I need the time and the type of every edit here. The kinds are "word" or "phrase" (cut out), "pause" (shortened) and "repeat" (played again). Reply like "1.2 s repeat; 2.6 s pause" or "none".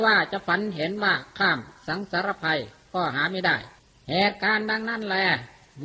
3.8 s pause